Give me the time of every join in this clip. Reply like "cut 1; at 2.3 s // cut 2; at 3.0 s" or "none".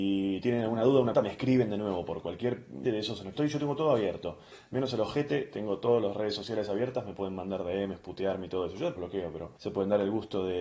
cut 1; at 1.1 s // cut 2; at 2.8 s // cut 3; at 3.3 s // cut 4; at 9.0 s // cut 5; at 9.6 s